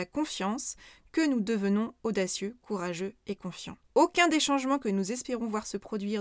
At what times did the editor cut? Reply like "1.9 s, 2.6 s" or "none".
3.8 s